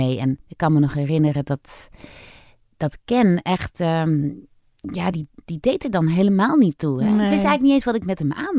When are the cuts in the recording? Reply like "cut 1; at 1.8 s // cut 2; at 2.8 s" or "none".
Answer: none